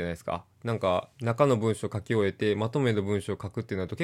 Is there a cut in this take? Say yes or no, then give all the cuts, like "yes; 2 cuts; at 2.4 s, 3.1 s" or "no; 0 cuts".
yes; 1 cut; at 1.1 s